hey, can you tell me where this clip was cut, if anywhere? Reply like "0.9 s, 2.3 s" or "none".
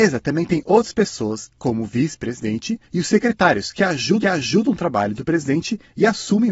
2.8 s, 4.2 s